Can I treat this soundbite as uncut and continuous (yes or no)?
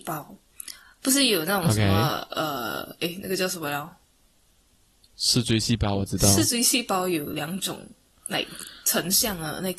yes